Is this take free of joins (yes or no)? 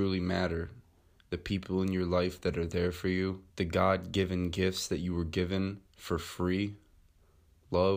no